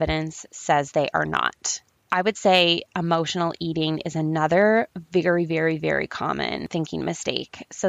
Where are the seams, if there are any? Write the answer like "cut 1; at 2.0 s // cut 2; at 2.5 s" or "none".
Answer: none